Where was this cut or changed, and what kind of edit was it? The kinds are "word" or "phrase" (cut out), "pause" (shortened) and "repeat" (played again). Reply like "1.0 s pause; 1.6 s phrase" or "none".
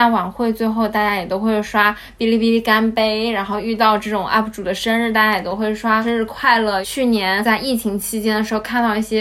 none